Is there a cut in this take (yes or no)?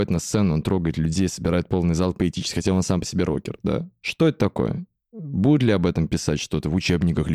no